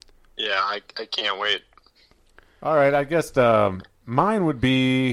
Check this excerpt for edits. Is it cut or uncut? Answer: uncut